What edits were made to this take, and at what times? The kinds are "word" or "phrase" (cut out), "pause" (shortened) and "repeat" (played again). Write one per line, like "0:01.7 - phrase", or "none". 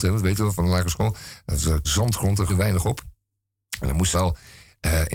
0:01.8 - word
0:02.5 - word
0:04.1 - word